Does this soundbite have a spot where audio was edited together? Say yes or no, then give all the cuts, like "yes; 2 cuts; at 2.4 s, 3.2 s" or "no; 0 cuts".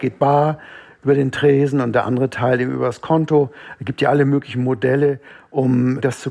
no; 0 cuts